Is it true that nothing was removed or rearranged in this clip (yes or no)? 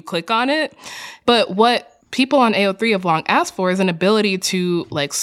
no